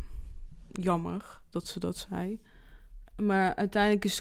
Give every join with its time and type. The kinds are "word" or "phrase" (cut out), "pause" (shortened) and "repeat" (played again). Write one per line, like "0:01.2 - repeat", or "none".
0:03.1 - pause